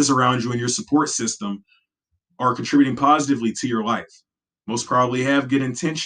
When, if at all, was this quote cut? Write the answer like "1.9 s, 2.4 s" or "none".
none

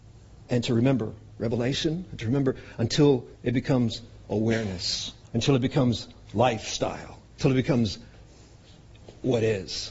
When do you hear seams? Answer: 3.3 s, 5.2 s

